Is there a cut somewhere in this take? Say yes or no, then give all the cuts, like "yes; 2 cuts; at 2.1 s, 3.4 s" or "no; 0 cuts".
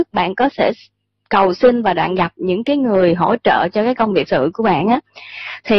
yes; 1 cut; at 4.3 s